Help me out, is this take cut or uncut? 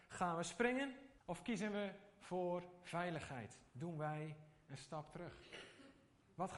cut